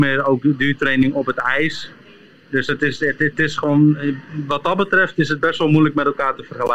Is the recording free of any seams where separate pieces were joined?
yes; 0 cuts

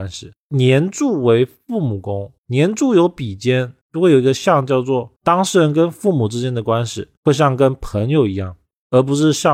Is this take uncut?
no; 4 cuts; at 2.4 s, 3.8 s, 5.2 s, 7.2 s

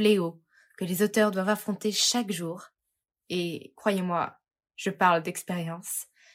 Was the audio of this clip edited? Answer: no; 0 cuts

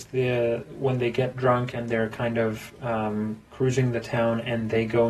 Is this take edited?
yes; 1 cut; at 3.5 s

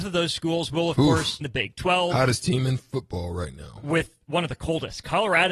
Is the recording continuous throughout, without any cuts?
no; 1 cut; at 1.4 s

